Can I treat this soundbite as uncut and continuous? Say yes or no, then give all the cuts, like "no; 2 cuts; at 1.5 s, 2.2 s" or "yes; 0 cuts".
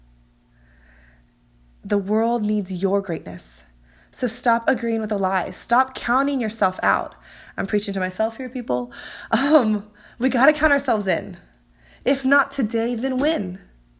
yes; 0 cuts